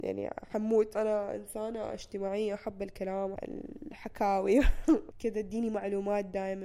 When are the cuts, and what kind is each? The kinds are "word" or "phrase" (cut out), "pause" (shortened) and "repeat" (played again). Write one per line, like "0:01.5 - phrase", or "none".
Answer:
0:00.9 - word
0:03.3 - word
0:05.1 - word